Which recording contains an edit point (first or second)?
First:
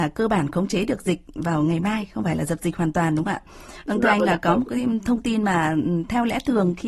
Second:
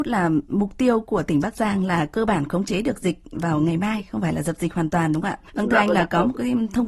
second